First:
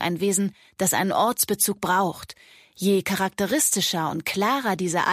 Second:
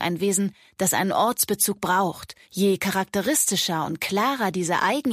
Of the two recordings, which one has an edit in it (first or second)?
second